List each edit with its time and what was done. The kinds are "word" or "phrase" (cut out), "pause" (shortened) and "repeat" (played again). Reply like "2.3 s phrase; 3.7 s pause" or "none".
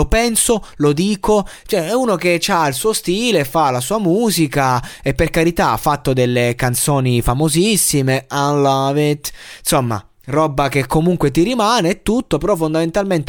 none